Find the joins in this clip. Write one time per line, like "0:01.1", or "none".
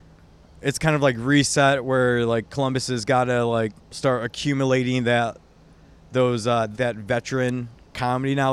0:03.8
0:06.8